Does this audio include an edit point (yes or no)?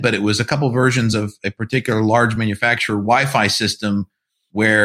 no